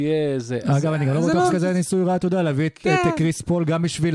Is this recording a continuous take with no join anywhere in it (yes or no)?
no